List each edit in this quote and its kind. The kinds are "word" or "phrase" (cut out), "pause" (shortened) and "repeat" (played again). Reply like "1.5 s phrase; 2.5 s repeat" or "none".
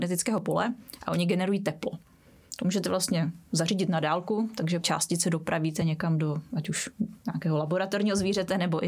4.8 s phrase